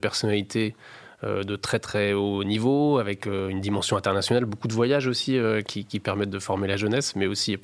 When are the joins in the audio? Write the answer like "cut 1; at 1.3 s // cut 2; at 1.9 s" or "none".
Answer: none